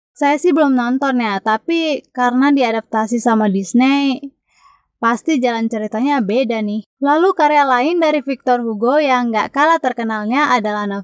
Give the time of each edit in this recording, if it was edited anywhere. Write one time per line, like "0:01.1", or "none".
0:06.9